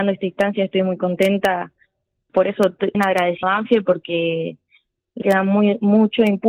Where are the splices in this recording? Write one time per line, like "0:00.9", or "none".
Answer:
0:02.3
0:02.9
0:03.4
0:05.2